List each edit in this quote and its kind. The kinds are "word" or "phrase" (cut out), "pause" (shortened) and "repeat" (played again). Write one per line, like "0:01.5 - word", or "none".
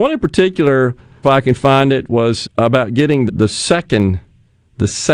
0:01.2 - word
0:02.4 - word
0:03.3 - word